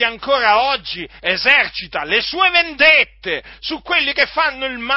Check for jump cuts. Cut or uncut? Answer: uncut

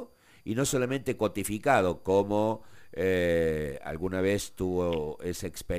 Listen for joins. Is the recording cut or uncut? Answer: uncut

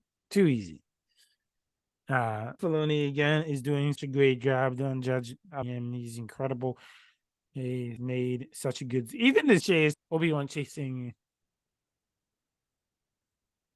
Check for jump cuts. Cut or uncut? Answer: cut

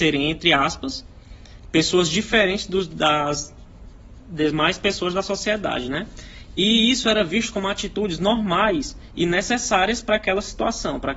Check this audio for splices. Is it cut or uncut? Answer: uncut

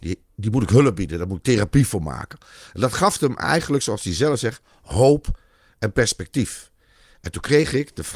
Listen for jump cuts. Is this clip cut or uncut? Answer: uncut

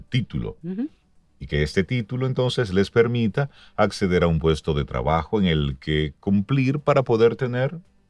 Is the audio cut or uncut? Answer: uncut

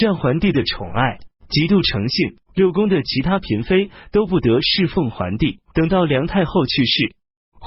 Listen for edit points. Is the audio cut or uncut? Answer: cut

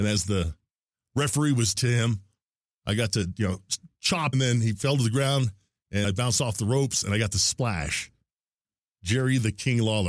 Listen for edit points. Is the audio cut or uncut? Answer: cut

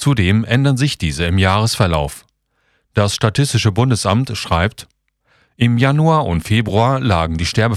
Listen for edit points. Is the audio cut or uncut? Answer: uncut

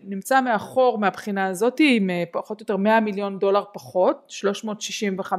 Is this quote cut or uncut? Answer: uncut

